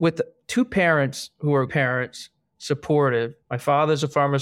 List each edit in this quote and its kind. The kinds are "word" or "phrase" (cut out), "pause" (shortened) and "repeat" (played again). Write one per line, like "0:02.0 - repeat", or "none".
0:01.7 - word
0:03.4 - pause